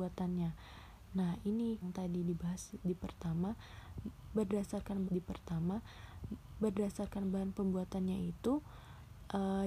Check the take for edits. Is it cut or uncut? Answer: cut